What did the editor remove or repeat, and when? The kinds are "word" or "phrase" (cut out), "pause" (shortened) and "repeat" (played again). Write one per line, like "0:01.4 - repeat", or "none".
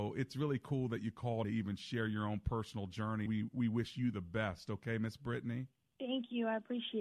0:01.4 - word
0:03.3 - word
0:05.8 - pause